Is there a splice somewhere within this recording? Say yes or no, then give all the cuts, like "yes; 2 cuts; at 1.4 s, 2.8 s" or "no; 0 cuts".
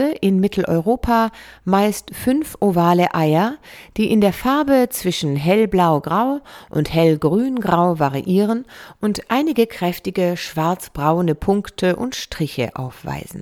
no; 0 cuts